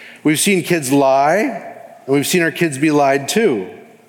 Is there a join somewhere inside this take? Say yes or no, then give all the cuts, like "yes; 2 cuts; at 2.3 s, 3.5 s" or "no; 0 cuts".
no; 0 cuts